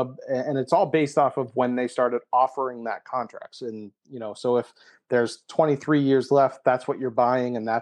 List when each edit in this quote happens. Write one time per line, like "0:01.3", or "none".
none

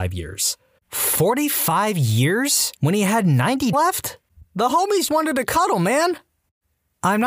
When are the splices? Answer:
0:02.8
0:03.7
0:05.1

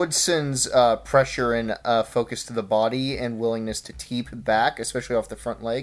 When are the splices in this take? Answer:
none

